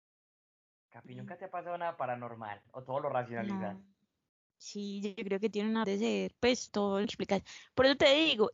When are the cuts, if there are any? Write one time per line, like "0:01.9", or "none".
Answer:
0:05.5
0:05.8
0:06.7
0:07.0